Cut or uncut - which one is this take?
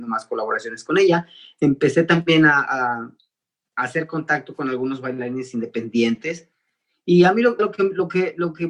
cut